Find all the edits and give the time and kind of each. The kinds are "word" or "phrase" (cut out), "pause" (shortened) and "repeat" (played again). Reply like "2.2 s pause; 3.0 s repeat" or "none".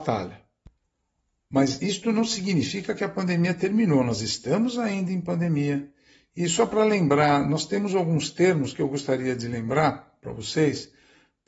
none